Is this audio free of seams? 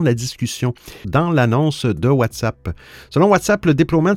no; 1 cut; at 1.0 s

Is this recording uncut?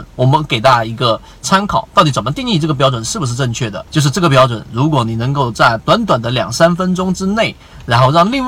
no; 1 cut; at 3.9 s

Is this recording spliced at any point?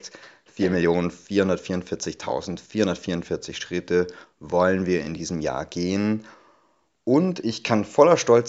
no; 0 cuts

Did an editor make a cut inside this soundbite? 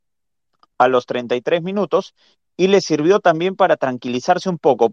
no; 0 cuts

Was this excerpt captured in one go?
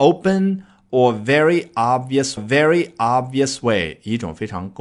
no; 1 cut; at 2.4 s

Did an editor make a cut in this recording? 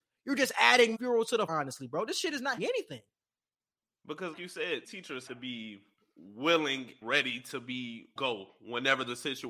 yes; 8 cuts; at 0.9 s, 1.5 s, 2.6 s, 4.3 s, 4.8 s, 5.3 s, 7.0 s, 8.2 s

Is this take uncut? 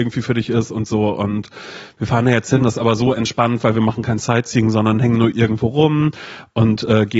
no; 1 cut; at 2.6 s

